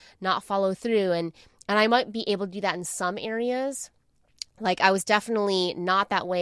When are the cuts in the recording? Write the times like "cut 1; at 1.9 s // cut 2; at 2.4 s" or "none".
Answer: none